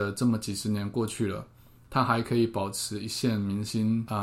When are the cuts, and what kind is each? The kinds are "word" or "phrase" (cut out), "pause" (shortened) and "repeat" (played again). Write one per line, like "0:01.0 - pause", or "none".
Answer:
none